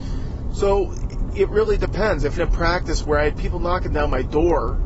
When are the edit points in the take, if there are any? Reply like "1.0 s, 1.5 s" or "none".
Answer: 2.4 s

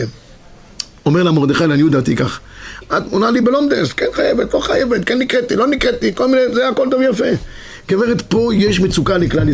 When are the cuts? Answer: none

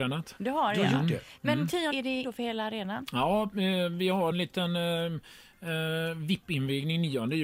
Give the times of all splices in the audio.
1.9 s, 2.2 s, 4.3 s

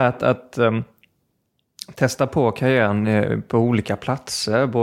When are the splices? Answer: none

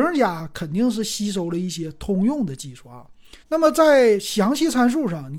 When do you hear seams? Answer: 3.4 s

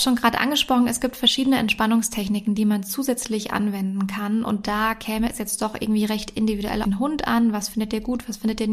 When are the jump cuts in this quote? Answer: 6.8 s

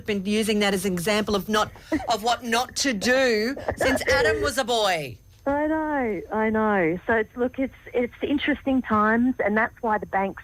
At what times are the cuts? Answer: none

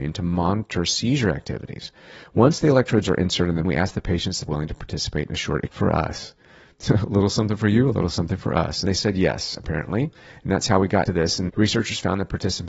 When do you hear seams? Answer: 3.6 s, 4.5 s, 5.7 s, 8.9 s, 11.1 s, 11.5 s

